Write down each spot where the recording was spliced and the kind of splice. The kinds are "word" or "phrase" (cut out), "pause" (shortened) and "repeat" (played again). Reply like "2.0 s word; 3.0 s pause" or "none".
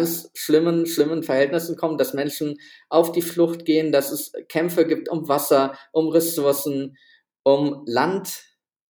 none